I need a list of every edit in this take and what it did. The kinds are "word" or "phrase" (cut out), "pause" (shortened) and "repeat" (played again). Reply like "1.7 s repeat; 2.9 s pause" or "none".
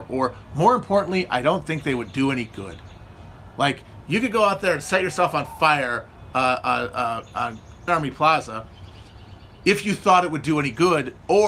7.9 s word

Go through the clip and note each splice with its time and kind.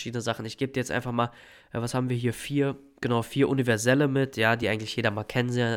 none

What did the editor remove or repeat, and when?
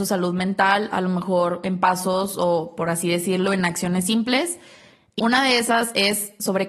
5.2 s word

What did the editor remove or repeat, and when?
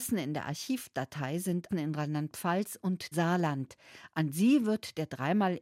1.7 s word; 3.1 s word

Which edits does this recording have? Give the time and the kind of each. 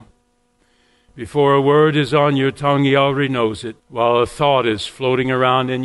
3.8 s pause

